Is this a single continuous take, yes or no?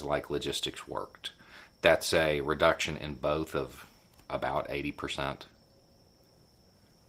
yes